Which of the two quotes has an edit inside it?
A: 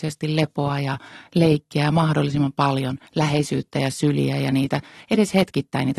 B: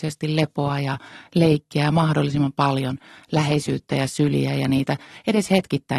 A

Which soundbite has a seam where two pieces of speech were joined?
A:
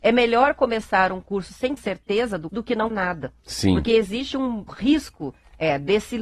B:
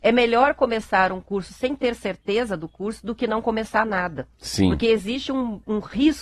A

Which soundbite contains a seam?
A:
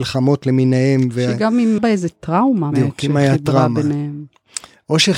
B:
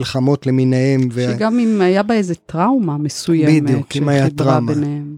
A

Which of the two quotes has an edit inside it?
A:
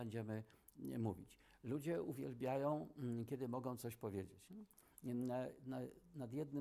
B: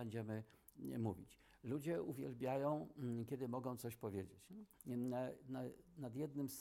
B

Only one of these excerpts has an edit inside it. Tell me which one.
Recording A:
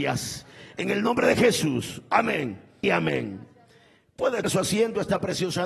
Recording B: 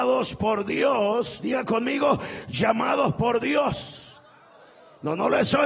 A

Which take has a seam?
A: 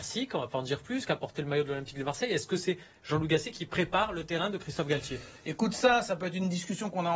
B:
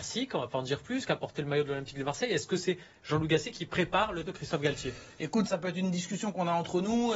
B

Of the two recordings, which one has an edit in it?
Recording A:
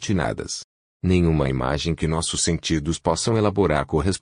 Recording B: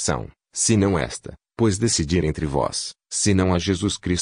B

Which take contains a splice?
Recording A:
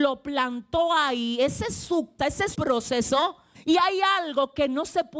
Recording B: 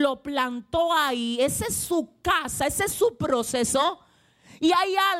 A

